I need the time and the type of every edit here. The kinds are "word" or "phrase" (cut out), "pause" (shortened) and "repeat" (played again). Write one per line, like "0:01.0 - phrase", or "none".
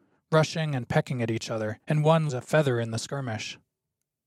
0:01.8 - pause
0:02.3 - word